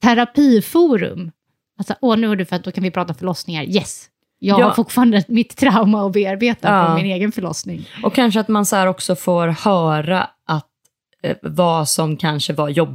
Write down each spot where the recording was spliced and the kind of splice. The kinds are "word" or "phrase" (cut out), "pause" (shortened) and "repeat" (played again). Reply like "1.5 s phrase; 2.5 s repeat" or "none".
none